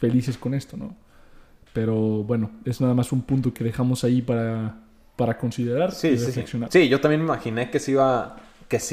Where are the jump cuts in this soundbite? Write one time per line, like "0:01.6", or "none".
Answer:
0:03.5